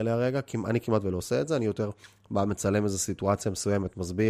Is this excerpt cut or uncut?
uncut